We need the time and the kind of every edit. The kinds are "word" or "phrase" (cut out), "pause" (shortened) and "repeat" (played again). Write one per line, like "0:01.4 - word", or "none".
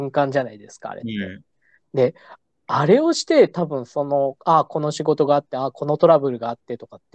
none